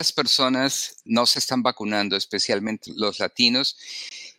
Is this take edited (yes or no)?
yes